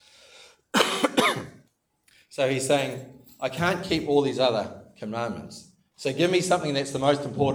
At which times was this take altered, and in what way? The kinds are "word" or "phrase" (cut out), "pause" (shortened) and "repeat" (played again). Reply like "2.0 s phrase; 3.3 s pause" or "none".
1.7 s pause